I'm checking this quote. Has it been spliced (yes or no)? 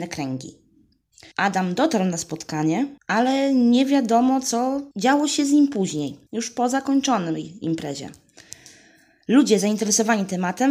yes